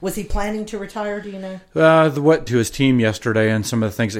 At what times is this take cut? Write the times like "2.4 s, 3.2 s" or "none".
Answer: 2.5 s